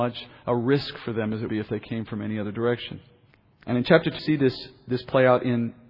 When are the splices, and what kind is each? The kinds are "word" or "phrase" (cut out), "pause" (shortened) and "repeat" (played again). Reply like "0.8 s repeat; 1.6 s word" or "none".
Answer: 1.5 s word; 3.3 s pause; 4.2 s word